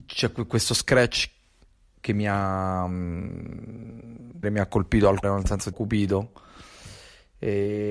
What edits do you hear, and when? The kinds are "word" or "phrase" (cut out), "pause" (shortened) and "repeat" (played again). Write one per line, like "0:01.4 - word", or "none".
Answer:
0:04.4 - word
0:05.2 - word
0:05.7 - word